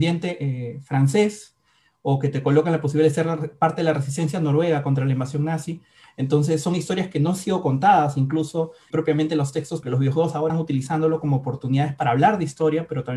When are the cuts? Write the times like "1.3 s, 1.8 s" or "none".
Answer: 8.9 s, 9.8 s, 10.5 s